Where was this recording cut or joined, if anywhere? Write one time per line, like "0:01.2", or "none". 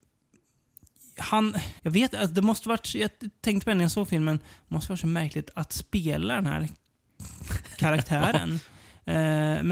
0:01.8